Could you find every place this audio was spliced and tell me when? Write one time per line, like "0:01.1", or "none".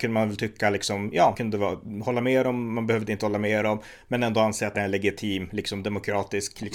0:01.3
0:04.7